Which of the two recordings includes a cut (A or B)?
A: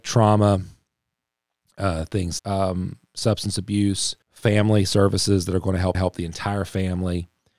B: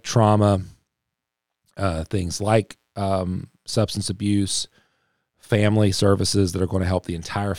A